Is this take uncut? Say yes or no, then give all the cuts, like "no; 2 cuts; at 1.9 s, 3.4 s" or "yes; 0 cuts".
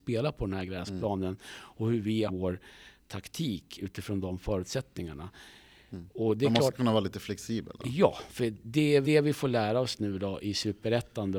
no; 2 cuts; at 2.3 s, 9.0 s